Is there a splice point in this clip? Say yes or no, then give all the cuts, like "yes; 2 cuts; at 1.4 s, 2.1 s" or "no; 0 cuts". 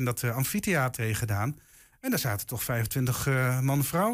yes; 1 cut; at 1.0 s